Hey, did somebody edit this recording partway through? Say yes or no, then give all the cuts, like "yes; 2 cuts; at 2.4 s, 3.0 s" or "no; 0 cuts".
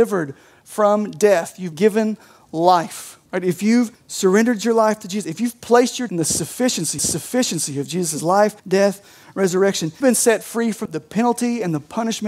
yes; 8 cuts; at 1.7 s, 3.3 s, 3.9 s, 6.1 s, 7.0 s, 8.6 s, 10.0 s, 10.9 s